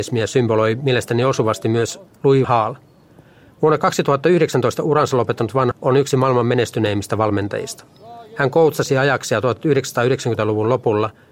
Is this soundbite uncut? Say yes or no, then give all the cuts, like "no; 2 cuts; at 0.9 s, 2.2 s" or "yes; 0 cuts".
no; 3 cuts; at 2.1 s, 2.4 s, 5.7 s